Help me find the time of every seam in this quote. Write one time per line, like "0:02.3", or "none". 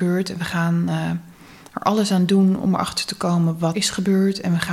0:03.7